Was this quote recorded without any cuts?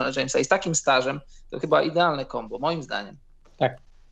no; 1 cut; at 1.6 s

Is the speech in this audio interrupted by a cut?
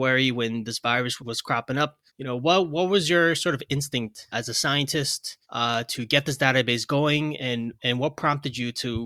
yes; 5 cuts; at 1.2 s, 2.1 s, 4.3 s, 5.4 s, 7.4 s

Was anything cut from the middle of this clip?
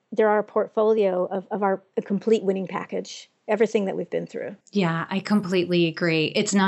yes; 1 cut; at 4.6 s

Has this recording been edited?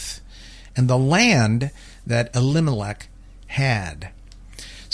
no; 0 cuts

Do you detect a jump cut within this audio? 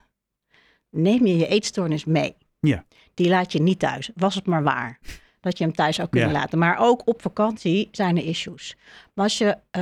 no; 0 cuts

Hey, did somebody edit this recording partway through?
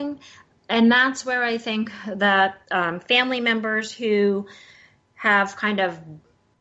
yes; 1 cut; at 2.6 s

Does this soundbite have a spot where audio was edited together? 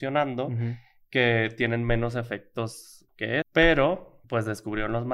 yes; 3 cuts; at 3.1 s, 3.4 s, 4.2 s

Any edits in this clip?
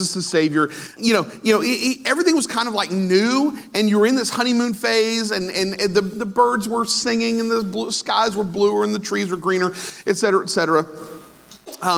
yes; 1 cut; at 0.9 s

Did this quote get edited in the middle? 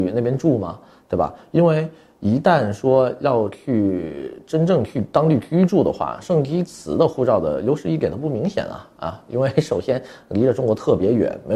no; 0 cuts

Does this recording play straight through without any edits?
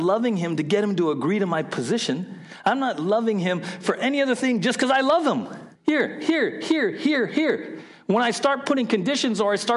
no; 1 cut; at 5.8 s

